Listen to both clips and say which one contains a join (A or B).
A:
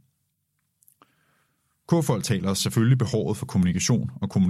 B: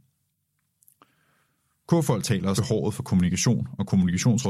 B